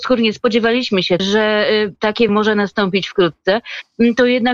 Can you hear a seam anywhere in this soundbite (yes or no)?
yes